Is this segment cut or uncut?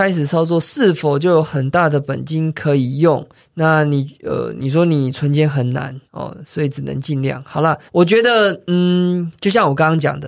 cut